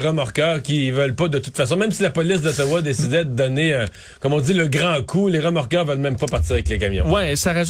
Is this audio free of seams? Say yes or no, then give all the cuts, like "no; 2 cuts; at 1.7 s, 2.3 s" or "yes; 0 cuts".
yes; 0 cuts